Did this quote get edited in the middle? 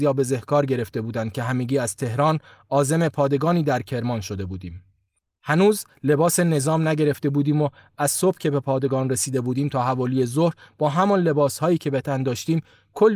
no; 0 cuts

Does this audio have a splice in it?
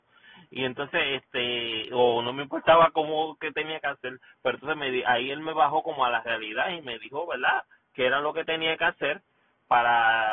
no; 0 cuts

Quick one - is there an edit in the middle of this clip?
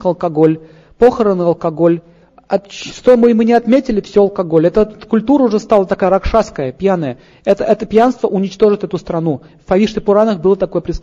no; 0 cuts

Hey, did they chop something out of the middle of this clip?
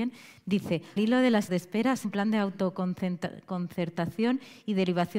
yes; 3 cuts; at 1.0 s, 1.5 s, 2.0 s

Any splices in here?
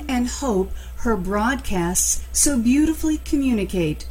no; 0 cuts

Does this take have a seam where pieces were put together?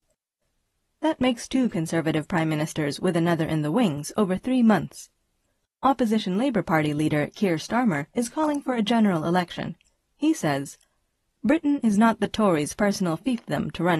no; 0 cuts

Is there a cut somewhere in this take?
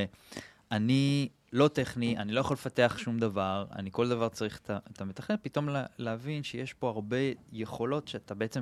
no; 0 cuts

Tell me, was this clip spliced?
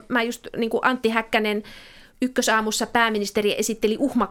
no; 0 cuts

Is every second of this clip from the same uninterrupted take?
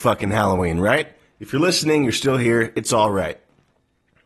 yes; 0 cuts

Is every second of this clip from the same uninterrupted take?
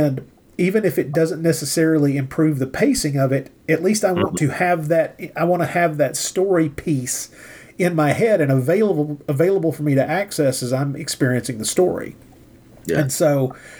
yes; 0 cuts

